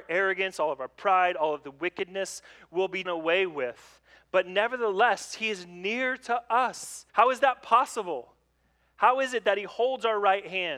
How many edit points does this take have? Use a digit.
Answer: 2